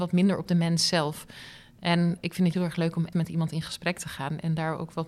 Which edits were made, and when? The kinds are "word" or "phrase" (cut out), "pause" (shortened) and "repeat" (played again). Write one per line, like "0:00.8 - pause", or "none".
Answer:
0:02.5 - word
0:03.1 - word

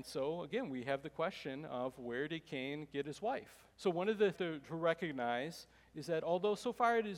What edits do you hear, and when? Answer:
0:03.7 - pause
0:04.3 - phrase

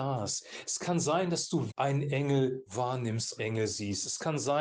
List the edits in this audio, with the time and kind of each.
0:01.7 - word
0:03.4 - word

